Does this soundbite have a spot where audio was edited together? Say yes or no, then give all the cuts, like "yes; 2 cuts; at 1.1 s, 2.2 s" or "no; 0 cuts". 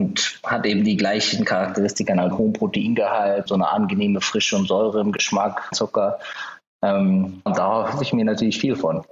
yes; 4 cuts; at 2.3 s, 3.5 s, 5.7 s, 7.5 s